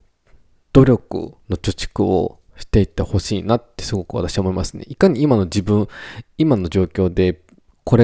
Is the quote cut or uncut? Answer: cut